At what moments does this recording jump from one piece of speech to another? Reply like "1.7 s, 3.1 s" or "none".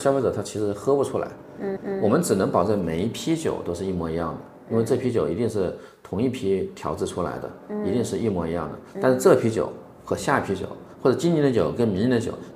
1.8 s